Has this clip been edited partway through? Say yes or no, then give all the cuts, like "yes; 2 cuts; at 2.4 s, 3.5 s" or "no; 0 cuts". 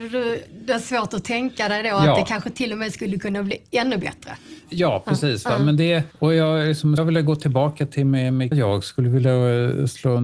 yes; 3 cuts; at 6.1 s, 7.0 s, 8.5 s